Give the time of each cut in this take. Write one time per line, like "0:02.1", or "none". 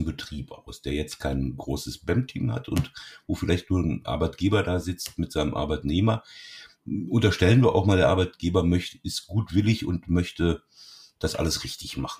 none

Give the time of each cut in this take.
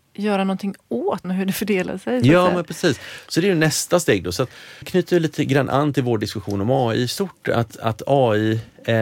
0:01.2
0:04.8

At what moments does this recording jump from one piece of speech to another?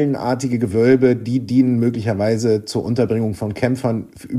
none

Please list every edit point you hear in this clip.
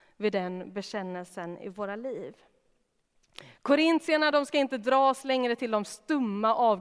none

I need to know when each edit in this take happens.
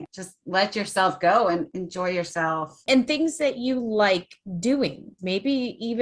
none

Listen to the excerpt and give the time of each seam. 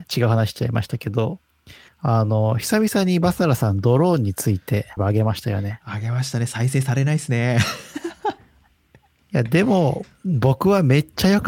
0:01.9
0:05.0

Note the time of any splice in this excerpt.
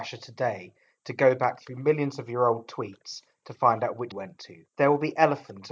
0:04.1
0:04.7

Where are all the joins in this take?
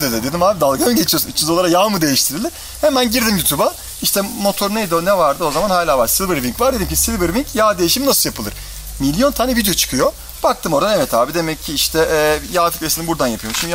none

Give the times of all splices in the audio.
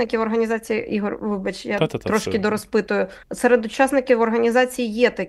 0:03.2

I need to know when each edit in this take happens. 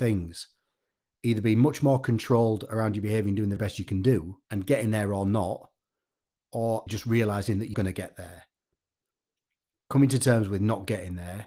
0:03.6
0:04.4
0:06.9
0:07.7

